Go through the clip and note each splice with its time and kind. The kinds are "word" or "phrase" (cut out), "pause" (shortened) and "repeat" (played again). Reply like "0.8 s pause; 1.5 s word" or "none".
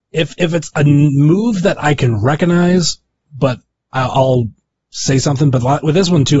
none

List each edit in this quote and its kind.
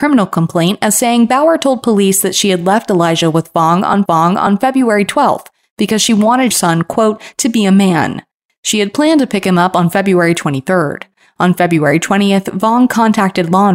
4.1 s repeat; 6.5 s phrase

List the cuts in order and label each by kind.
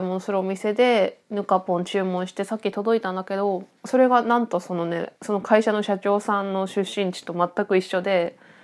3.8 s pause; 5.2 s pause

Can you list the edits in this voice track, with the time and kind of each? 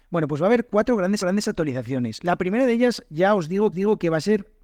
1.2 s repeat; 3.7 s repeat

